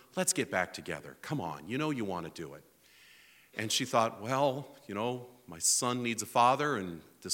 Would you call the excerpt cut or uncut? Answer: uncut